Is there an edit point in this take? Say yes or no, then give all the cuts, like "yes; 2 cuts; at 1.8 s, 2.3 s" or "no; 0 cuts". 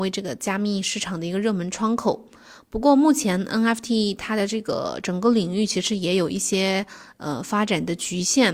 no; 0 cuts